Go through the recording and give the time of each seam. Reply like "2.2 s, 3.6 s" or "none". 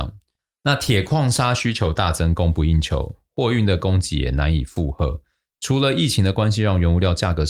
none